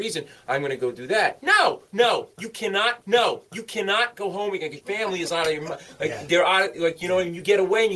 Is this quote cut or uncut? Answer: cut